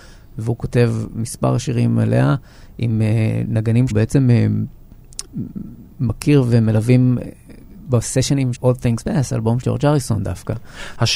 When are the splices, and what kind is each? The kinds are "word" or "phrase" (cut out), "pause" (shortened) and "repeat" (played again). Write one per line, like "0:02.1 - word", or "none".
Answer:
0:03.9 - word
0:08.5 - word
0:09.0 - word
0:09.6 - word

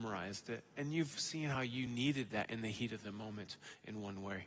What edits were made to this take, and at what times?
none

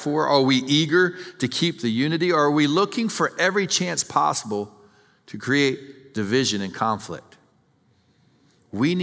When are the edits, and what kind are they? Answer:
none

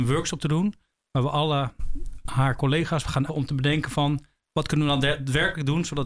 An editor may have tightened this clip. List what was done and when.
0:03.3 - word

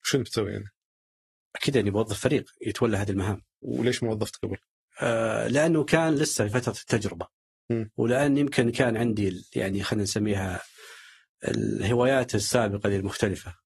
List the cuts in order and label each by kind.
none

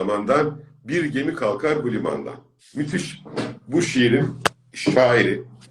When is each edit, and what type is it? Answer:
0:02.6 - pause

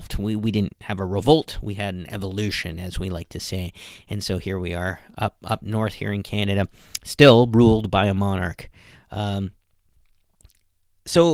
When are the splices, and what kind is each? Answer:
none

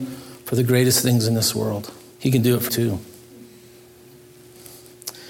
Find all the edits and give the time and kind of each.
0:02.1 - pause
0:02.7 - word

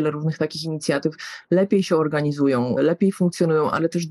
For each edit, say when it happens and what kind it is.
none

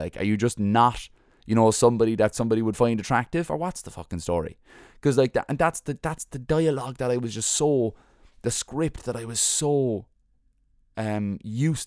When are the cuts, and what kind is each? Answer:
none

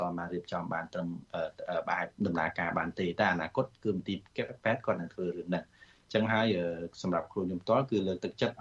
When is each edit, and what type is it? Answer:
0:02.2 - pause

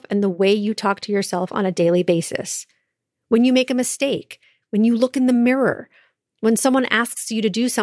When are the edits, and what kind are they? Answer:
none

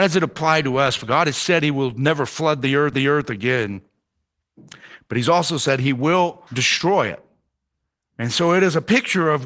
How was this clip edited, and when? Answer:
0:02.9 - repeat
0:06.5 - pause

